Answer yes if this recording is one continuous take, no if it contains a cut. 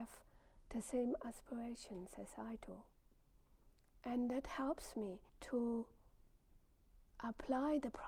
no